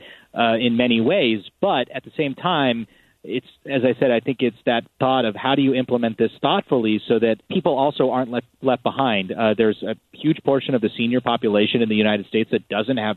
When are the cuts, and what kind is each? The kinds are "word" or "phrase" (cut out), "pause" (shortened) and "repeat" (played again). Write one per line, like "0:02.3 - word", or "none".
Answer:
0:07.4 - pause